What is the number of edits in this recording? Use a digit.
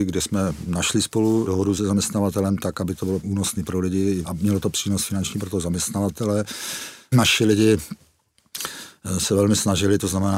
0